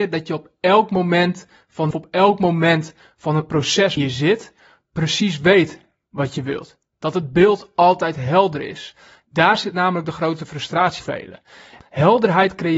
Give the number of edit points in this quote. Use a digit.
3